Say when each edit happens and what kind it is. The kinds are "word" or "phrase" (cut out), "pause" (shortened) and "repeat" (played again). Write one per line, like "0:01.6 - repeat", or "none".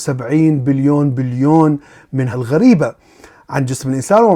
0:02.3 - phrase

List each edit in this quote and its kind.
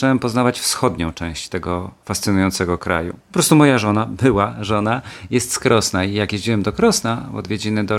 0:03.2 - pause

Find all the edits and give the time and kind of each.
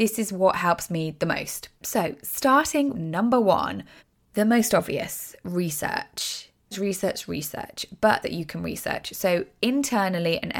0:01.8 - pause
0:02.9 - word
0:04.0 - pause
0:06.7 - word
0:08.2 - phrase

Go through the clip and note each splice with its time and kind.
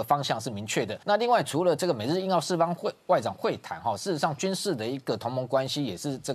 0:01.0 - pause

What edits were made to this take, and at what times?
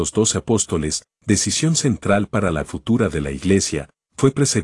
0:02.6 - word

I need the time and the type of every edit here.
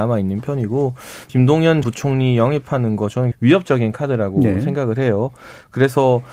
0:01.3 - word
0:01.8 - word
0:03.3 - word

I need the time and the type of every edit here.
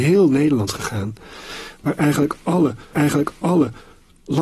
0:02.9 - repeat

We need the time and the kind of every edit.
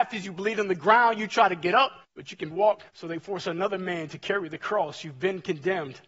0:02.0 - pause
0:02.5 - word
0:02.9 - pause

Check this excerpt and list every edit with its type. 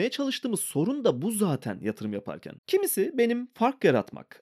0:02.6 - pause

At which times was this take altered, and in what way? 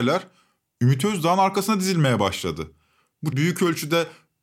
0:03.3 - word

